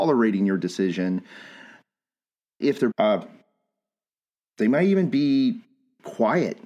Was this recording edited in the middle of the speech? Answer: yes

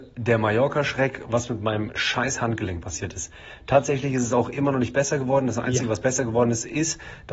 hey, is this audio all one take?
yes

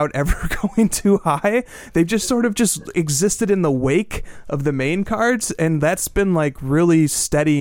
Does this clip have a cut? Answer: no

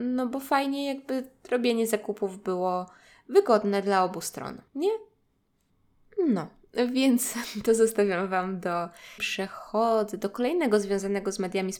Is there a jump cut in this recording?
yes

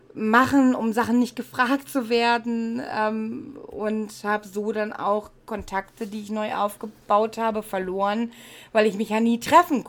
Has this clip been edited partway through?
yes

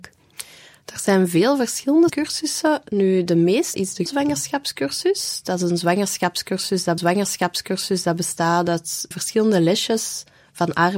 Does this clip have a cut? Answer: yes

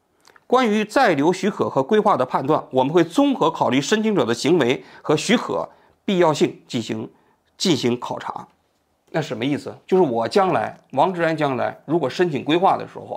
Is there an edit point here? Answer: yes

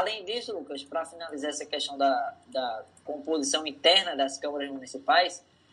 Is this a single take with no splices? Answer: yes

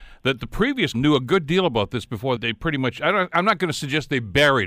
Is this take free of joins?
no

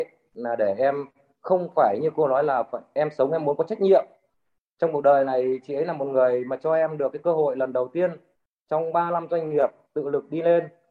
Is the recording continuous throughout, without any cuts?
yes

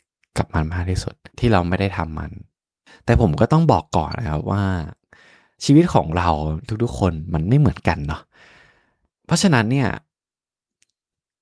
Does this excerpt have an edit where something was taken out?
yes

